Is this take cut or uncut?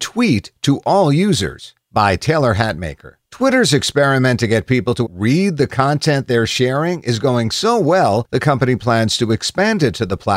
cut